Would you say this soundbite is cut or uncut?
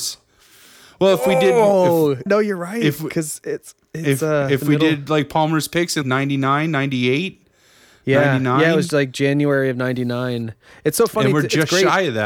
cut